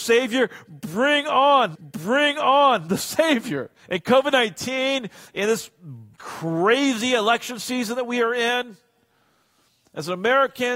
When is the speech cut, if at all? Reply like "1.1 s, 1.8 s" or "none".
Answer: 1.7 s, 3.8 s, 6.1 s